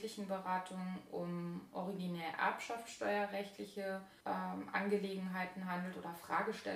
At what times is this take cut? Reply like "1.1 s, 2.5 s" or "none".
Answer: 4.2 s